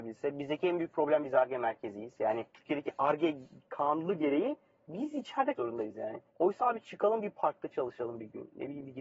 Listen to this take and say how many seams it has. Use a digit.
3